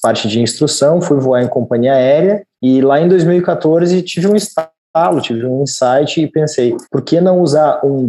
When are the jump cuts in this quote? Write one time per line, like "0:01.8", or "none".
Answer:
0:02.5
0:06.9